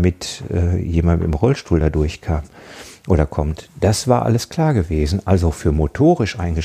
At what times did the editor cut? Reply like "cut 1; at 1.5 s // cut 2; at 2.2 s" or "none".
none